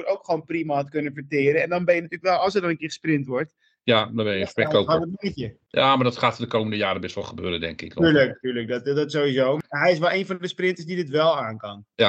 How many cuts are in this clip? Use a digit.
0